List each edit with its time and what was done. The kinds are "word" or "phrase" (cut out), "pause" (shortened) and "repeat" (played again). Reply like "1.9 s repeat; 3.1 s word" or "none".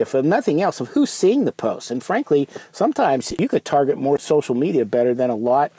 none